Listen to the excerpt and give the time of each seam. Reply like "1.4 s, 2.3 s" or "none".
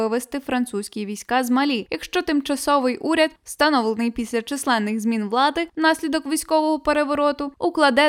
3.4 s

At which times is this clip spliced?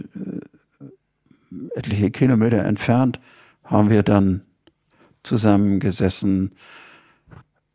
none

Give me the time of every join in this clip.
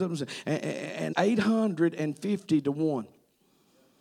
1.1 s

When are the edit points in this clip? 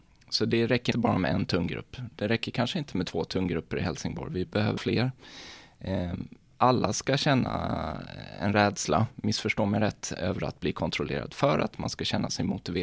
0.9 s, 4.8 s, 10.2 s

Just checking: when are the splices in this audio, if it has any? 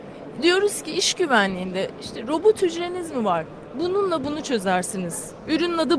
none

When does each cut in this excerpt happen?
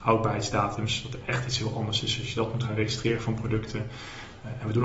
none

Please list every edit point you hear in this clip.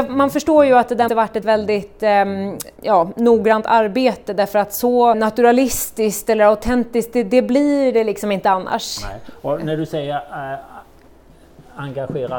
1.1 s, 1.4 s, 2.8 s, 5.1 s

